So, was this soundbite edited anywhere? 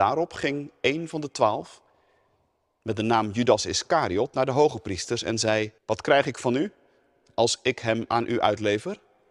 yes; 1 cut; at 5.8 s

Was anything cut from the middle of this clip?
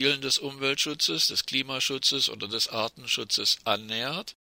no; 0 cuts

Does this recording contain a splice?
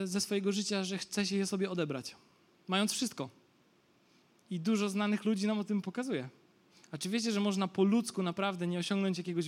no; 0 cuts

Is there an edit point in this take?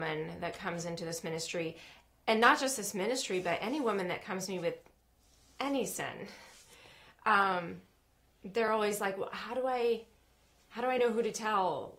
no; 0 cuts

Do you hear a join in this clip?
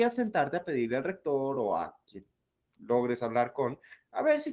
no; 0 cuts

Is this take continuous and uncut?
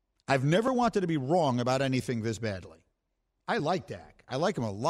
yes; 0 cuts

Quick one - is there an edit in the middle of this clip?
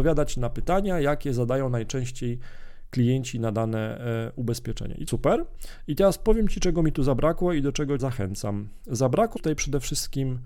yes; 3 cuts; at 5.1 s, 8.0 s, 9.4 s

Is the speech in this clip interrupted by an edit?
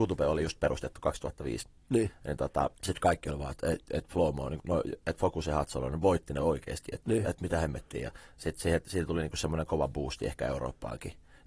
yes; 2 cuts; at 2.8 s, 4.6 s

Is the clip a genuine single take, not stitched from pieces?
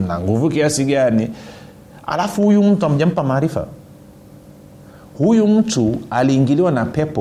yes; 0 cuts

